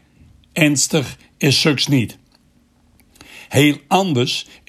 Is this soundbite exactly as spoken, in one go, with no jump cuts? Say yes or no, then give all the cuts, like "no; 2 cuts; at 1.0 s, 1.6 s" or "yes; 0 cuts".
yes; 0 cuts